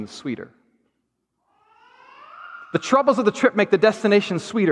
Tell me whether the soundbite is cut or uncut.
uncut